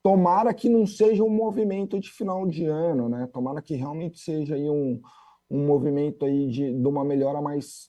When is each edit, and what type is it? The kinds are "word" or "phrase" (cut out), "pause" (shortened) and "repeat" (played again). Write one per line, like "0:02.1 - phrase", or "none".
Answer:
none